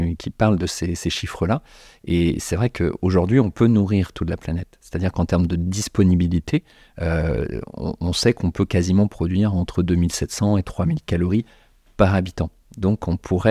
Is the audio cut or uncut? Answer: uncut